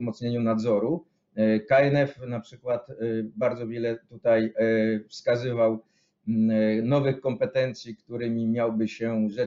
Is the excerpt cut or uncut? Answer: uncut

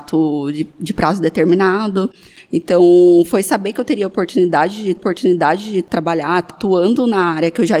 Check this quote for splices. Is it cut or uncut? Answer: cut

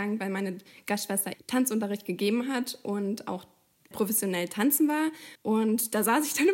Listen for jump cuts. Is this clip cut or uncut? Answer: cut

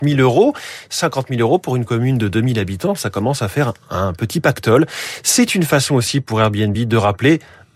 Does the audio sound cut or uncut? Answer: uncut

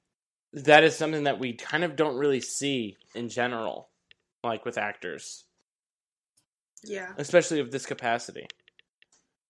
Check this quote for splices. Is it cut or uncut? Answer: cut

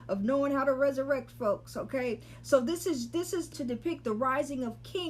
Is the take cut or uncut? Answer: cut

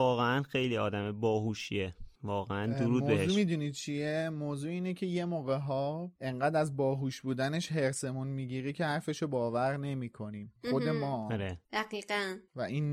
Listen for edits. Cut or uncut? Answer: cut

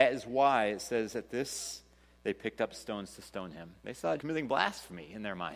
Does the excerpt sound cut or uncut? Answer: cut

